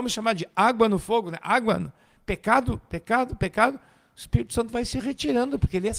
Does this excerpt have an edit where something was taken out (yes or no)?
no